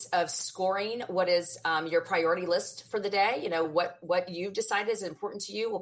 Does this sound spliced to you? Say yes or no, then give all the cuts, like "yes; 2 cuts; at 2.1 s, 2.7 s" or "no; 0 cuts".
no; 0 cuts